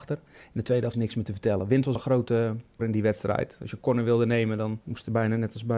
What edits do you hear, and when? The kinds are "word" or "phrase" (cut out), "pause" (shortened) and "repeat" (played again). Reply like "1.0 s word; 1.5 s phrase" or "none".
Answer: 0.9 s word; 2.0 s word; 2.8 s word; 4.8 s pause